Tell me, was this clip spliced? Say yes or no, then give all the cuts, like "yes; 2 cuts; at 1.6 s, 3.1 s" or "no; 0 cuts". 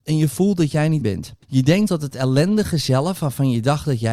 yes; 3 cuts; at 1.0 s, 1.4 s, 1.9 s